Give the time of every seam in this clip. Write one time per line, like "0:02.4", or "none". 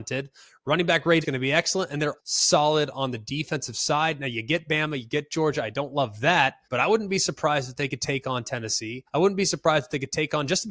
0:01.2
0:02.2
0:06.6
0:09.1